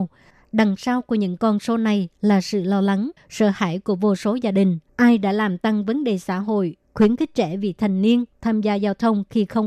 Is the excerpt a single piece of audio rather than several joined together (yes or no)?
no